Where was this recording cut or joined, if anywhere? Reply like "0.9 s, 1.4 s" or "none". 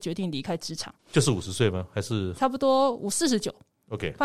1.0 s